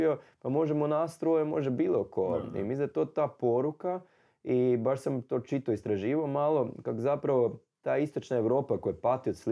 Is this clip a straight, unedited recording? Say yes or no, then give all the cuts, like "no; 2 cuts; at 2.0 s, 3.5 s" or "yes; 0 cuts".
yes; 0 cuts